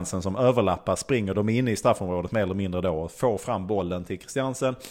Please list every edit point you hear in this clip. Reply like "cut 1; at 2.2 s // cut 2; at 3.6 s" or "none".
none